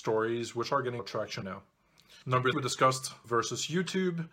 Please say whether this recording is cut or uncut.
cut